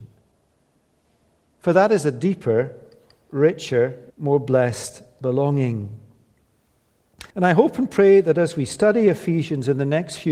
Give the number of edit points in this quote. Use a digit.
2